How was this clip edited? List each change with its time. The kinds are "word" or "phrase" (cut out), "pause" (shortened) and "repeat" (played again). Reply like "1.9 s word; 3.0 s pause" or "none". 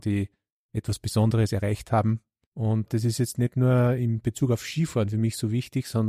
2.4 s pause

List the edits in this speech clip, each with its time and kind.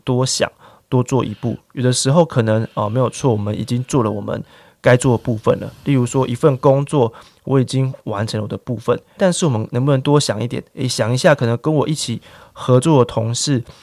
9.2 s word

